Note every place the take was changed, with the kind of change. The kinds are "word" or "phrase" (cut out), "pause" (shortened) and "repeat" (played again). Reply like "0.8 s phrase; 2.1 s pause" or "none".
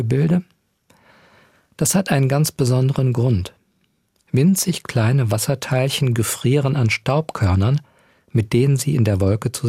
none